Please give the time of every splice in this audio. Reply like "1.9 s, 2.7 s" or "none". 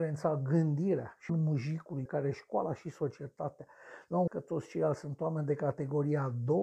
1.3 s, 2.1 s, 4.3 s